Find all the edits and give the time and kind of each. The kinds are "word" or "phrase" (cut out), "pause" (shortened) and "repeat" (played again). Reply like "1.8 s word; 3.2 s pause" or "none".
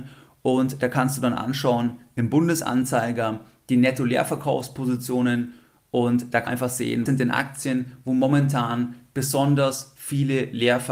6.5 s word; 7.1 s word